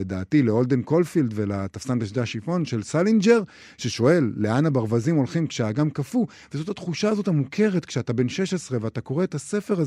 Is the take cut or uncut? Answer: uncut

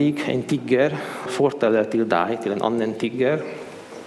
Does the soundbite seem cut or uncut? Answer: cut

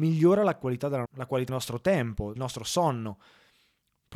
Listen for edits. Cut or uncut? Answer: cut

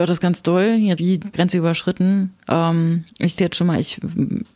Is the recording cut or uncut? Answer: cut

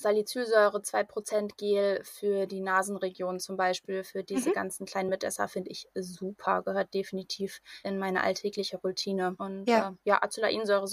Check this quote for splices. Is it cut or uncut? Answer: uncut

